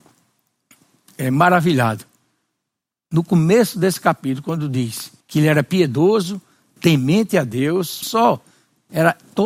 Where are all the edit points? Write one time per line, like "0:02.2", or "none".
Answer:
0:05.2
0:08.0